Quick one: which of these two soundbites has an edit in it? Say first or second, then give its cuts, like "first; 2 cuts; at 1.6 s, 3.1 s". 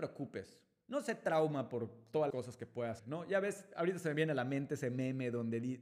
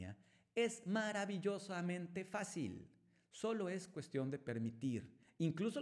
first; 2 cuts; at 2.3 s, 3.0 s